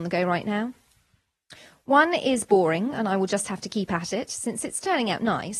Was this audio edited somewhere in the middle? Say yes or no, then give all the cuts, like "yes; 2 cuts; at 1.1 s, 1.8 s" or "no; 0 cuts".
no; 0 cuts